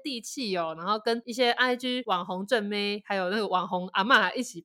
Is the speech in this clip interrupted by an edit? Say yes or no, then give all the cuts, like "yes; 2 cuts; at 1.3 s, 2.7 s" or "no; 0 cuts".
no; 0 cuts